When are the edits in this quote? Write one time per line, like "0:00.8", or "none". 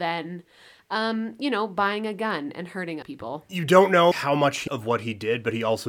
0:03.0
0:04.1
0:04.7